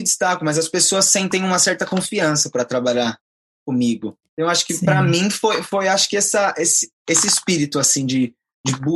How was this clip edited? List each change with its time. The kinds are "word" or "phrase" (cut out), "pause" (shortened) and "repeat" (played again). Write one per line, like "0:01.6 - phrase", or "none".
0:04.3 - pause
0:07.0 - pause